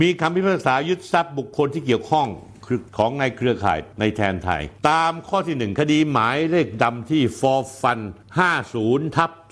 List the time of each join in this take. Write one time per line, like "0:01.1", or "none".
0:02.9